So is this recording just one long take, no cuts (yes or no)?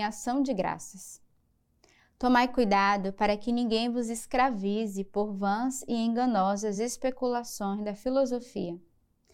yes